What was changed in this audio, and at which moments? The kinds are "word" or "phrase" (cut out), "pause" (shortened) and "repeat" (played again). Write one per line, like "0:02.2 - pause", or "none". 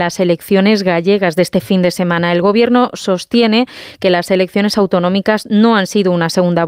none

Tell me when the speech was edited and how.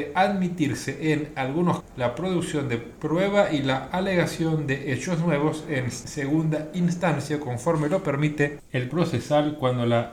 0:01.8 - word
0:08.9 - word

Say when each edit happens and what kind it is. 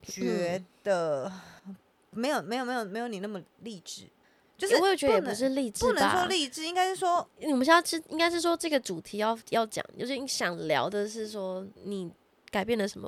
0:01.6 - pause
0:04.2 - pause
0:11.8 - pause

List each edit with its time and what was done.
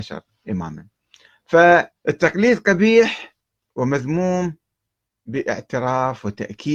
0:02.0 - pause

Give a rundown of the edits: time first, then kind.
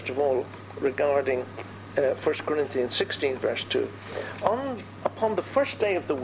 none

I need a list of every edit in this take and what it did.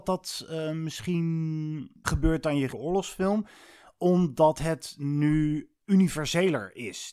0:02.0 - word
0:02.7 - word

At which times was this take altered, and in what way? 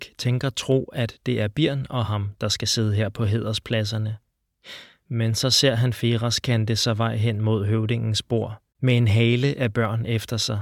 0:08.7 - pause

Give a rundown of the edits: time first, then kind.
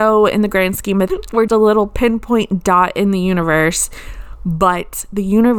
0:01.1 - word
0:01.5 - word

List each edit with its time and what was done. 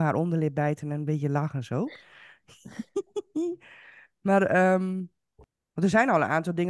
none

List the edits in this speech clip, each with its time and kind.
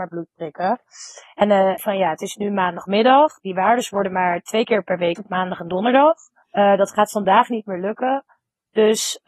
0:01.8 - phrase
0:03.4 - pause
0:05.1 - word
0:06.4 - pause

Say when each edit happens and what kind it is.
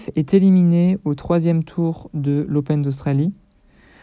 none

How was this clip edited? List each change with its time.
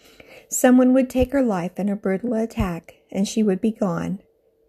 none

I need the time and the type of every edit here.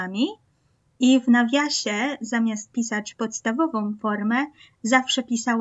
none

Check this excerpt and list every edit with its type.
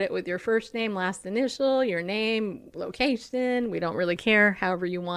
none

